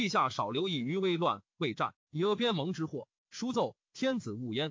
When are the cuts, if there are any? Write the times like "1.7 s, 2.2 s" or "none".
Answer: 3.2 s